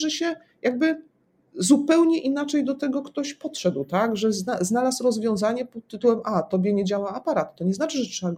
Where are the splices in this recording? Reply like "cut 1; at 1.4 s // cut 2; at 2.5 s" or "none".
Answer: none